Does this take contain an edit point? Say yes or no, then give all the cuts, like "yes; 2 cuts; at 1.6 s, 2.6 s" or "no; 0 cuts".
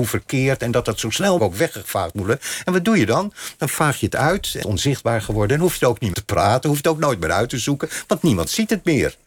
yes; 3 cuts; at 1.4 s, 4.6 s, 6.1 s